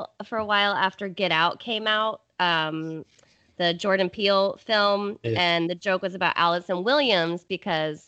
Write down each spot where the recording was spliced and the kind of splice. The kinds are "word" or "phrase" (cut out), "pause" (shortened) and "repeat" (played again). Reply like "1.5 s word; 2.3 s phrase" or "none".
none